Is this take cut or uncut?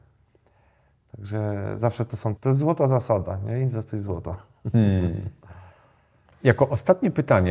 cut